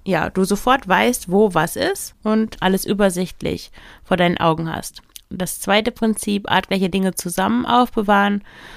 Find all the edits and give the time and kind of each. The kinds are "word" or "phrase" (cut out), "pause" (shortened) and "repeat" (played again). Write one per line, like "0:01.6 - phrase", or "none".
0:05.1 - pause